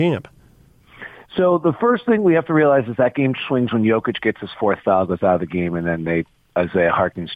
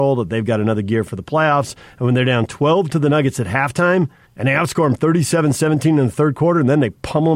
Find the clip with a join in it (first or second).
second